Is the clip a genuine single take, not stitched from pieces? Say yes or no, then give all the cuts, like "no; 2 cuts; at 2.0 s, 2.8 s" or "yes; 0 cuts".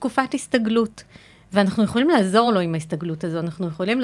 yes; 0 cuts